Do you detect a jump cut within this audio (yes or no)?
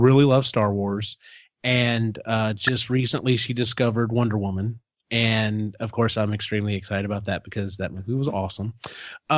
no